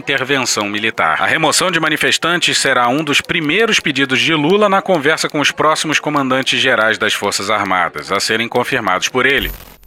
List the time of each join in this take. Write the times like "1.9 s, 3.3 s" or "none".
none